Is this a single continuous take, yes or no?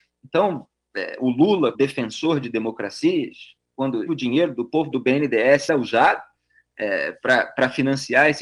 no